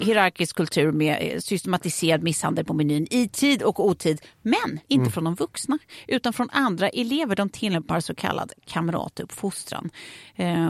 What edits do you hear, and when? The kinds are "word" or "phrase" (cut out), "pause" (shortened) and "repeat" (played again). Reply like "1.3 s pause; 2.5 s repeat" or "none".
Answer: 4.8 s pause

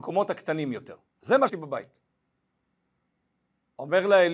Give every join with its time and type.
1.1 s pause; 1.5 s word

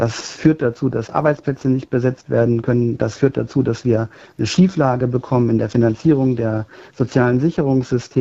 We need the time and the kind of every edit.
none

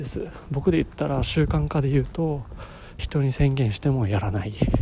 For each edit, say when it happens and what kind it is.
3.0 s phrase

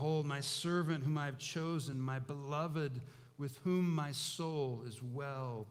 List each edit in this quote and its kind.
none

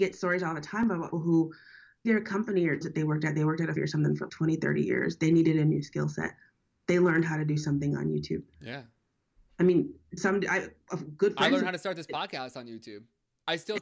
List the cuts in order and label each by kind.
1.1 s word; 2.0 s word; 2.8 s word; 3.8 s word; 4.3 s word; 10.2 s word

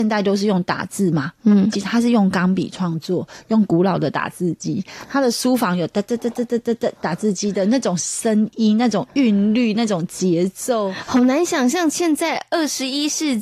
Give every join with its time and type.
1.7 s phrase

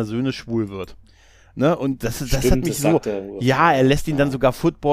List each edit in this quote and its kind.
none

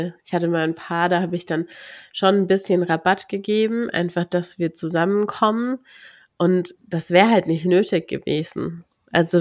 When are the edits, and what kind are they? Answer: none

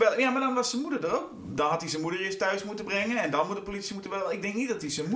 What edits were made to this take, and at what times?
none

